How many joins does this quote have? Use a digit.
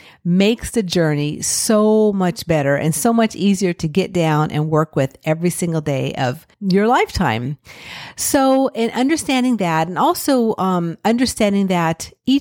1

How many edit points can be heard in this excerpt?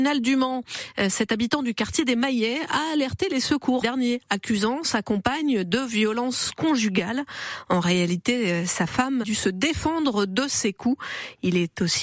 2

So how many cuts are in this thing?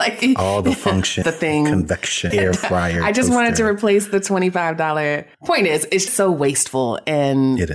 4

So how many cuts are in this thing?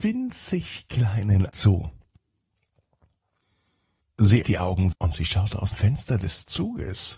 4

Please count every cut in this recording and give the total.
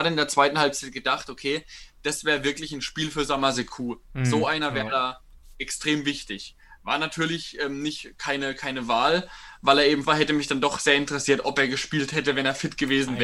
1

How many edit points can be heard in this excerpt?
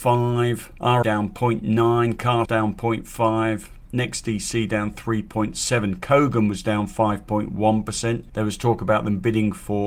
2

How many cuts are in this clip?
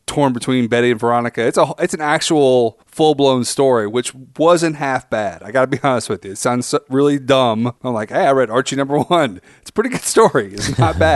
2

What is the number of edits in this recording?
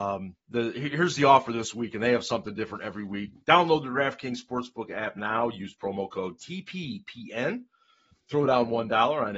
0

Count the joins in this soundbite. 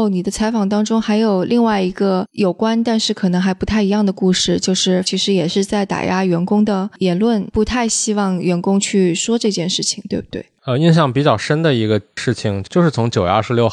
1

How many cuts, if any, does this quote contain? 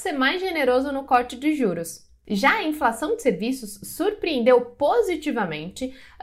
0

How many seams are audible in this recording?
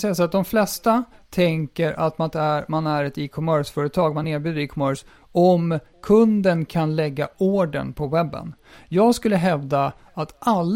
0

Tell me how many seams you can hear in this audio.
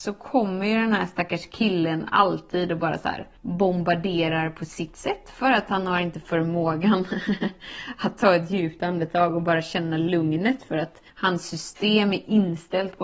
2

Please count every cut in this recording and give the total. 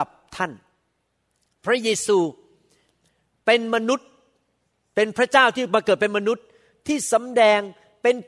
0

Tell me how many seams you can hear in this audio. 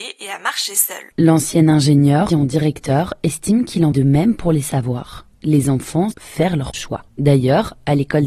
7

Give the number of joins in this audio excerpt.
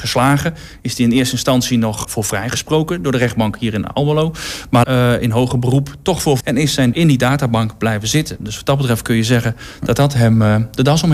4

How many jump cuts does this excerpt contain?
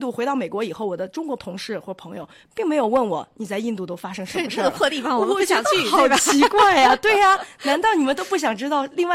0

